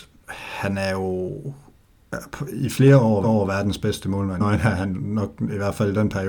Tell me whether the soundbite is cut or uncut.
cut